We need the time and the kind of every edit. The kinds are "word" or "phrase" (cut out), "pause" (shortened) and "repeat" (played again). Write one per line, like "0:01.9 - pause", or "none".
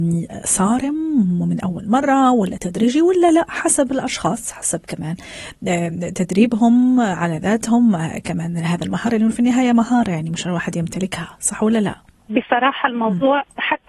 none